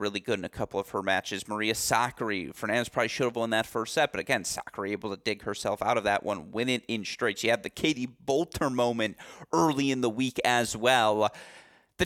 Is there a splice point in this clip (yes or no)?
no